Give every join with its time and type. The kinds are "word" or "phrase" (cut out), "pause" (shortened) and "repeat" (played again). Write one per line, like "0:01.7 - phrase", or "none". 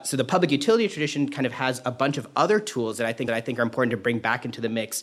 0:03.3 - repeat